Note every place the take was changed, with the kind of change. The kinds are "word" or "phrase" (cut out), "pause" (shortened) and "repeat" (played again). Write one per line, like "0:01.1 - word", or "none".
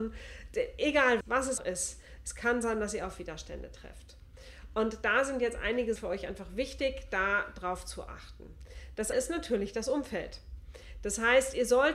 0:01.2 - word
0:01.6 - word
0:06.0 - word
0:09.1 - word